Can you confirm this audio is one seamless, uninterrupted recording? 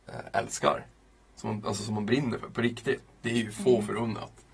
yes; 0 cuts

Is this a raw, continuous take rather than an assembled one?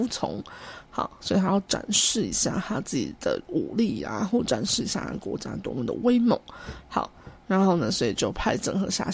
yes; 0 cuts

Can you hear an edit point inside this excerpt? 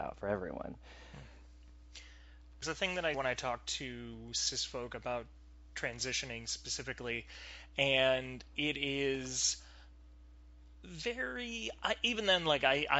yes; 2 cuts; at 2.6 s, 3.1 s

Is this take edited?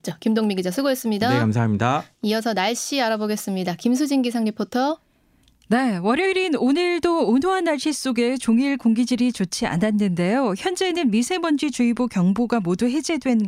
no; 0 cuts

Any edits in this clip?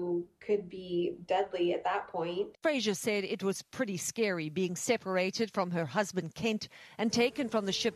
no; 0 cuts

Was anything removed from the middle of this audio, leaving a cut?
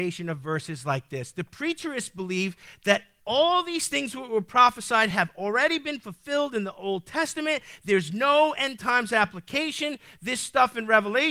no; 0 cuts

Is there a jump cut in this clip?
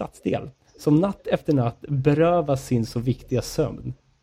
no; 0 cuts

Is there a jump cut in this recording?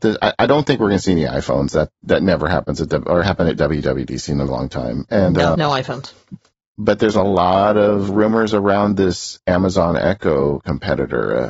yes; 4 cuts; at 3.2 s, 4.5 s, 5.5 s, 8.1 s

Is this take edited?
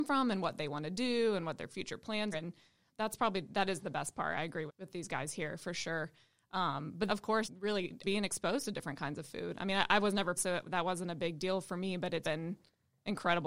yes; 8 cuts; at 2.3 s, 2.9 s, 4.7 s, 7.1 s, 7.4 s, 8.0 s, 10.4 s, 12.2 s

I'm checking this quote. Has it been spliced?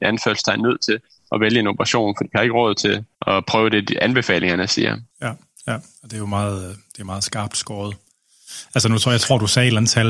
yes; 2 cuts; at 3.1 s, 5.1 s

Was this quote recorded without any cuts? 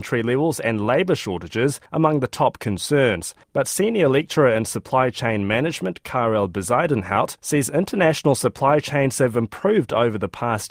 no; 3 cuts; at 1.9 s, 3.4 s, 7.4 s

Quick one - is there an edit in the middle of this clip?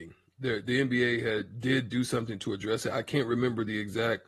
no; 0 cuts

